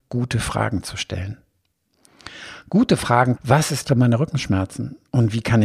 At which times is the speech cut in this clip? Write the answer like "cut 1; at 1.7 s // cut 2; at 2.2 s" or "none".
cut 1; at 3.4 s // cut 2; at 3.9 s